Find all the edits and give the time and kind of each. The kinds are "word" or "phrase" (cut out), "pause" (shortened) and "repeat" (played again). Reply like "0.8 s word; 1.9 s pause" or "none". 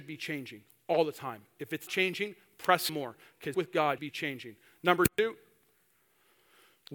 1.9 s word; 2.9 s word; 3.5 s word; 4.0 s word

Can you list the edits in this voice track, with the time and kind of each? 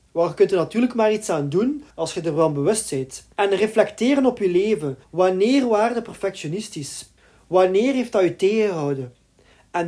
1.9 s pause; 3.3 s pause; 5.0 s pause; 7.2 s pause

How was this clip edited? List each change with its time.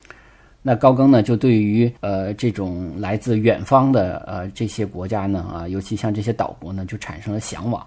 2.0 s pause

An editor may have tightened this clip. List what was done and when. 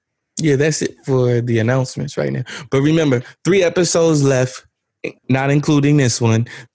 5.2 s pause

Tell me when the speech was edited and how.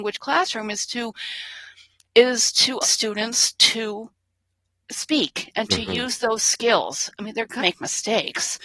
2.8 s word; 7.6 s word

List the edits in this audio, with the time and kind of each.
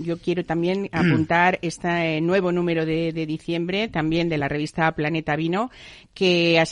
none

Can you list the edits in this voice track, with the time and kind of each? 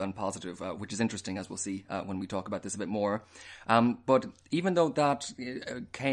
none

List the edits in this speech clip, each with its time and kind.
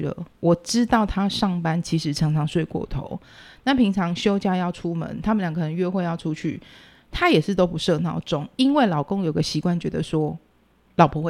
none

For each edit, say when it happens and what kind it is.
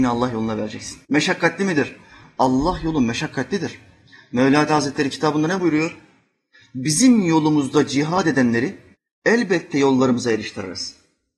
1.0 s pause; 4.7 s word; 8.9 s pause

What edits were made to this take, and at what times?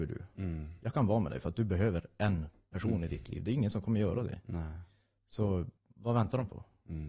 5.8 s pause

